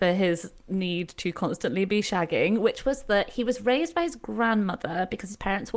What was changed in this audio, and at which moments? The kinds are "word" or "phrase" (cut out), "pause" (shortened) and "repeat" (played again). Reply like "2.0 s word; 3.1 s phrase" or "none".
none

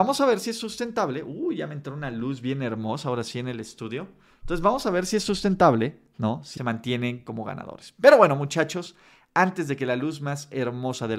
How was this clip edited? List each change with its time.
6.6 s phrase

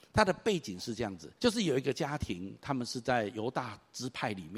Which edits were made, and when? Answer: 1.4 s pause

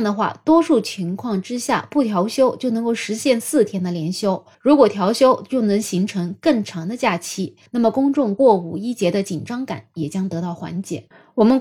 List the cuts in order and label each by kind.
4.5 s pause; 7.7 s pause

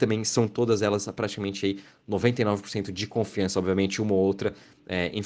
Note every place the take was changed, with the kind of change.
none

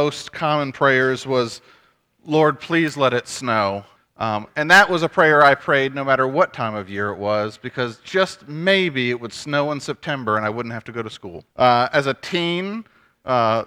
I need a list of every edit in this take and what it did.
4.0 s pause; 11.5 s pause

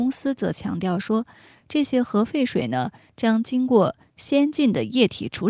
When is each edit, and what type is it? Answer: none

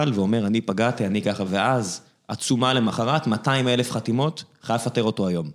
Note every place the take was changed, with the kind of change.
1.4 s word

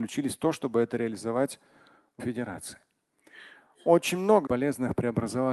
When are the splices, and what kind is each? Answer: 2.2 s word; 4.5 s word

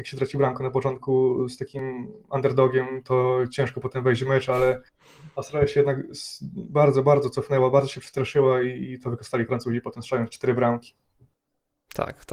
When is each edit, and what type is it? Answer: none

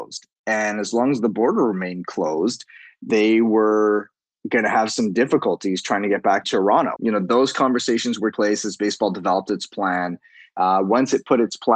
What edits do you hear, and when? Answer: 3.1 s word; 6.4 s word; 7.0 s word; 8.3 s word

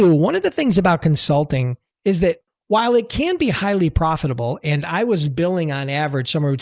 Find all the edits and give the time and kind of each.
none

